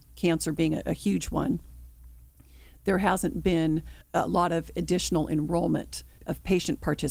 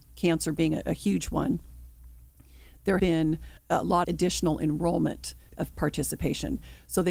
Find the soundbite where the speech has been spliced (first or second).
second